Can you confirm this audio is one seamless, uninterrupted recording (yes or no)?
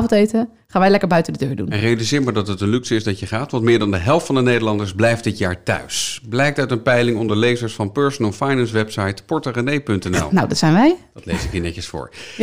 yes